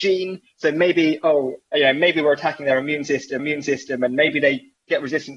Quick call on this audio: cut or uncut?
cut